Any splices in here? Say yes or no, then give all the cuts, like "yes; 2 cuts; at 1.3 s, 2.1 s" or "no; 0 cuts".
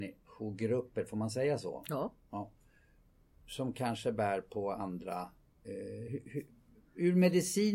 no; 0 cuts